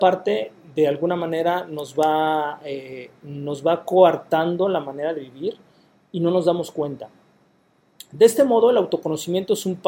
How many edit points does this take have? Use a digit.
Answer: 0